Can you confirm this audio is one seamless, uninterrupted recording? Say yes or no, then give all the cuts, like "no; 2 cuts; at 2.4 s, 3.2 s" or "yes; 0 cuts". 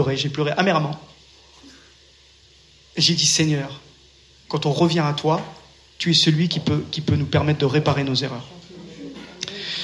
yes; 0 cuts